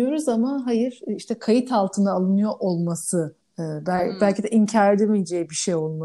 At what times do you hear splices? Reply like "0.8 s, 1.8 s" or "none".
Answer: 3.4 s